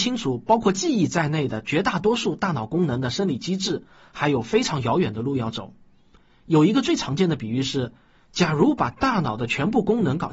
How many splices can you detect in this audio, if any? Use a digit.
0